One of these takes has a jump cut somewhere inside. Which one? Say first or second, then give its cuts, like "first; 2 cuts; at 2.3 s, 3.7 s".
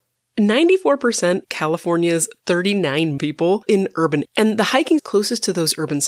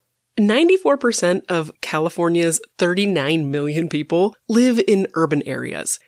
first; 5 cuts; at 1.4 s, 3.2 s, 3.7 s, 4.2 s, 5.0 s